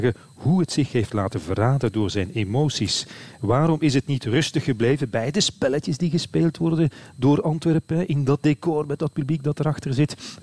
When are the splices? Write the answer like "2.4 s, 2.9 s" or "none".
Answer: none